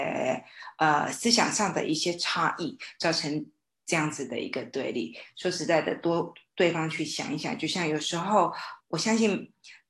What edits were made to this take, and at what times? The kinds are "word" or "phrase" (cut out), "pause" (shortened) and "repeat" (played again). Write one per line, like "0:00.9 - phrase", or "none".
0:08.8 - word